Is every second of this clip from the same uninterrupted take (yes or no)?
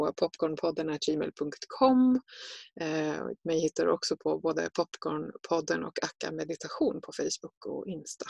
yes